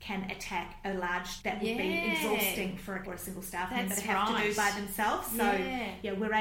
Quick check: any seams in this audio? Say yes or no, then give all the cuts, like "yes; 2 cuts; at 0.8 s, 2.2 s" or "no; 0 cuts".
yes; 2 cuts; at 1.4 s, 3.0 s